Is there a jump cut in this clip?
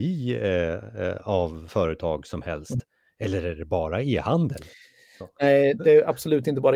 no; 0 cuts

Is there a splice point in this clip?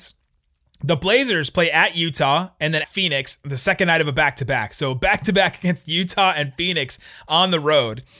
yes; 1 cut; at 2.8 s

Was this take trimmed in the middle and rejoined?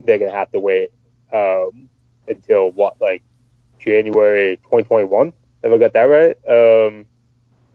no; 0 cuts

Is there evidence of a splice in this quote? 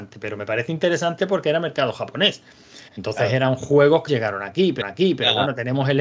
yes; 4 cuts; at 1.2 s, 2.9 s, 4.1 s, 4.8 s

